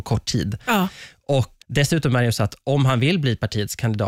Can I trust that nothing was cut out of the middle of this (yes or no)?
no